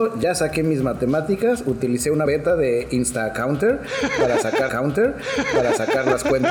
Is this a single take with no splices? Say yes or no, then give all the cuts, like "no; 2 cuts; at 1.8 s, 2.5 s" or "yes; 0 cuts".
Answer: no; 2 cuts; at 2.3 s, 4.7 s